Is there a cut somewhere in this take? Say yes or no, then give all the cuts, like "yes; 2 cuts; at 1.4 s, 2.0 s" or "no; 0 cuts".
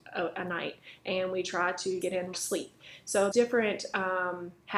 yes; 3 cuts; at 2.0 s, 2.3 s, 3.3 s